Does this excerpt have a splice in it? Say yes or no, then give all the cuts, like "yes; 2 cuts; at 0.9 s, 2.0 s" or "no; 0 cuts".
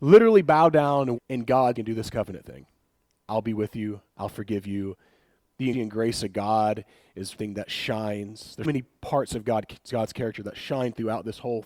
yes; 6 cuts; at 1.2 s, 1.7 s, 4.1 s, 5.7 s, 7.4 s, 8.6 s